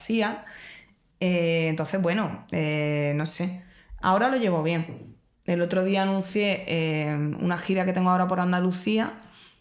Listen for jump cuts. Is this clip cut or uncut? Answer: uncut